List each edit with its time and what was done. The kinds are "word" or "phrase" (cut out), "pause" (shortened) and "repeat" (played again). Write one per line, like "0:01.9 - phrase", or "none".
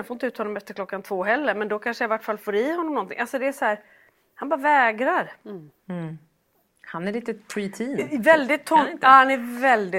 none